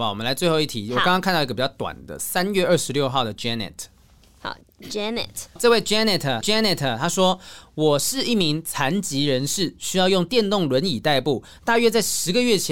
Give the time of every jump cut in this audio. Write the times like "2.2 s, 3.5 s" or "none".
5.6 s, 6.4 s